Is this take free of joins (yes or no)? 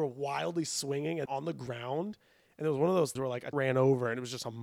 no